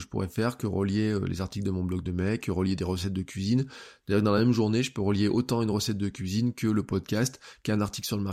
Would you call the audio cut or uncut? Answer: uncut